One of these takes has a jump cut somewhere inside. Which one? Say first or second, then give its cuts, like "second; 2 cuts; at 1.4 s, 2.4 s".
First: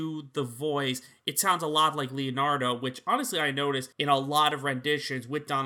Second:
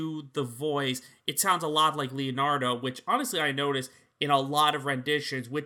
first; 1 cut; at 3.9 s